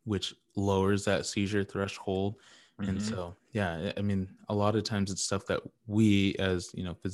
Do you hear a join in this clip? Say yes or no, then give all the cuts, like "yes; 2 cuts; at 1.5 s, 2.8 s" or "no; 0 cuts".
no; 0 cuts